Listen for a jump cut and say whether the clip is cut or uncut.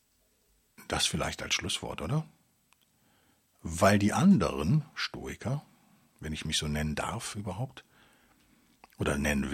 uncut